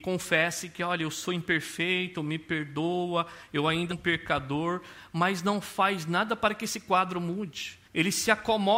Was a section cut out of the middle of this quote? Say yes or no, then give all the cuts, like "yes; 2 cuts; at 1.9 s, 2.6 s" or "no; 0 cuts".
yes; 2 cuts; at 3.9 s, 7.9 s